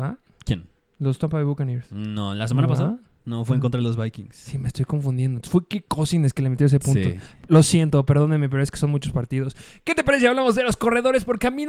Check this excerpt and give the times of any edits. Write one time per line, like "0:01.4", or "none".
none